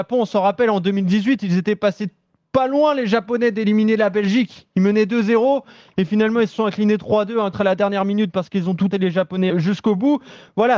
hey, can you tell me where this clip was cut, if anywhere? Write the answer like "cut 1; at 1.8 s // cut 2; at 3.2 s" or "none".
cut 1; at 7.5 s // cut 2; at 8.9 s // cut 3; at 9.5 s